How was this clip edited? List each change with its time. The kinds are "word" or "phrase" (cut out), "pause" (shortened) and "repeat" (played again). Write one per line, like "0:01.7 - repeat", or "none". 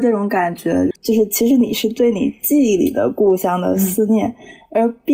0:00.9 - pause